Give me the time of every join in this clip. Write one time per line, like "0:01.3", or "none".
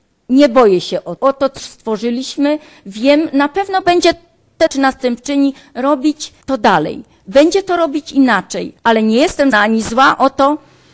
0:01.2
0:01.6
0:03.3
0:04.7
0:06.4
0:08.8
0:09.5